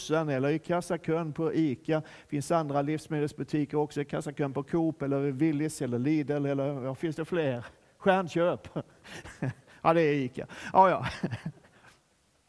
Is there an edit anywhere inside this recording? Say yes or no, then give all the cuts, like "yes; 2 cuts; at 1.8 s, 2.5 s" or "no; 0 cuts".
no; 0 cuts